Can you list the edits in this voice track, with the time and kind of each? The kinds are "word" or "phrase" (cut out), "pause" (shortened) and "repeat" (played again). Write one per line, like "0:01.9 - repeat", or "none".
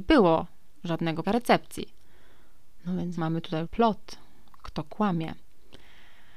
0:01.2 - word
0:03.2 - word
0:03.6 - word